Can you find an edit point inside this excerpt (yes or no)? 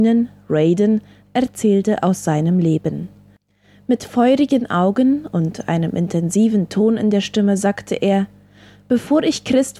no